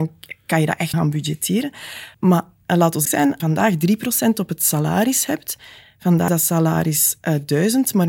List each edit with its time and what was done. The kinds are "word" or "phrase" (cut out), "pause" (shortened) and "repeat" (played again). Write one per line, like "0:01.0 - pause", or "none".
0:00.9 - word
0:02.1 - pause
0:03.1 - word
0:03.4 - phrase
0:06.3 - word